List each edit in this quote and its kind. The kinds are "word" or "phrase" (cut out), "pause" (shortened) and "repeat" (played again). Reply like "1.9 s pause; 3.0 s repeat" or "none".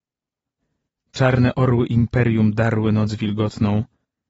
none